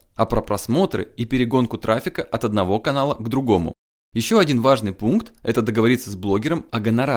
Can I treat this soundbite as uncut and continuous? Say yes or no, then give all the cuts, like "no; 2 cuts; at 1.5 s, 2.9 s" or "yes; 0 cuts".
yes; 0 cuts